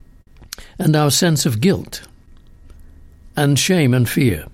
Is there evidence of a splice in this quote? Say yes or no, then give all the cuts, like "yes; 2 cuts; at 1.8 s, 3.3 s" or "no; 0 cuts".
no; 0 cuts